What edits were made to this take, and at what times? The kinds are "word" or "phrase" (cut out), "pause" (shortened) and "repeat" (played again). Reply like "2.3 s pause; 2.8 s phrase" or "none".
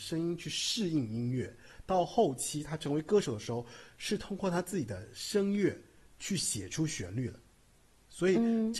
none